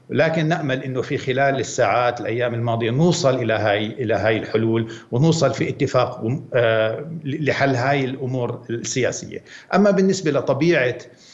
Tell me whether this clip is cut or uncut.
uncut